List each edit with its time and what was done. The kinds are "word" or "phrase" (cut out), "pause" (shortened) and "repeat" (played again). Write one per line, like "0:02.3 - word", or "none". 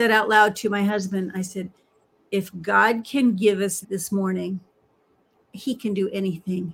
0:03.8 - word